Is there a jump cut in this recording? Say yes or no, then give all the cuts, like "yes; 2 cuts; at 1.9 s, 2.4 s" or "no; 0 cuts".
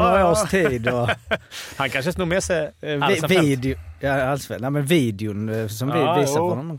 no; 0 cuts